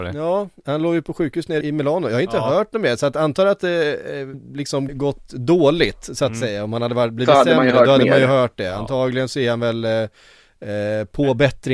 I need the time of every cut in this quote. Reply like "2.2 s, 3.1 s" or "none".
1.6 s, 4.3 s, 4.9 s